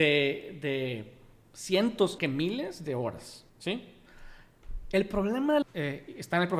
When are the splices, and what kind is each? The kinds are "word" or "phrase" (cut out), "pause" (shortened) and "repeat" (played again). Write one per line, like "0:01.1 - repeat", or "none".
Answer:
0:02.2 - word
0:03.5 - pause
0:05.6 - word